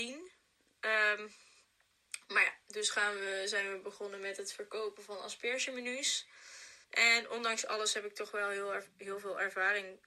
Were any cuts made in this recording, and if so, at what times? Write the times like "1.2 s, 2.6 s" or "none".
6.8 s